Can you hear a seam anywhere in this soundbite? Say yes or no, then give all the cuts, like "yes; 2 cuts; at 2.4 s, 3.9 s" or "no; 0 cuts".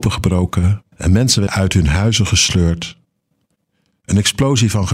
yes; 2 cuts; at 0.9 s, 1.5 s